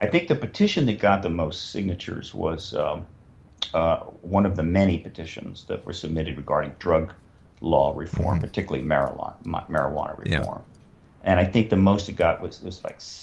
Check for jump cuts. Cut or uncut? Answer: uncut